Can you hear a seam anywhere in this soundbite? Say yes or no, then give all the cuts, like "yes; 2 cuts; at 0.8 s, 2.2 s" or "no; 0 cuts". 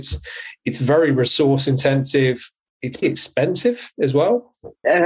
yes; 1 cut; at 3.0 s